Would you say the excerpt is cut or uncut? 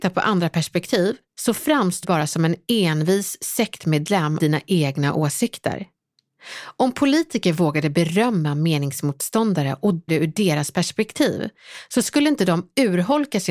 cut